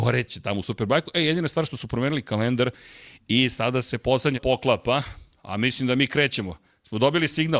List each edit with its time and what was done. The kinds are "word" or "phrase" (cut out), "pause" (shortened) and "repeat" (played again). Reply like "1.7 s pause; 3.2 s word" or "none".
4.3 s word